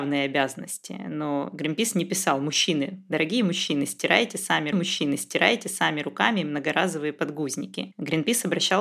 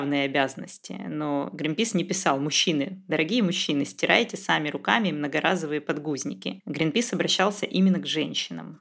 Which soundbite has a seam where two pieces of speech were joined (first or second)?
first